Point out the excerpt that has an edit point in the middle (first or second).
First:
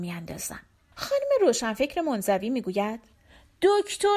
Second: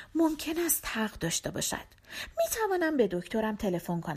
first